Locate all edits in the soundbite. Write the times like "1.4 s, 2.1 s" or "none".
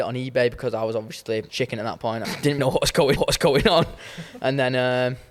1.5 s, 2.2 s, 2.6 s, 3.2 s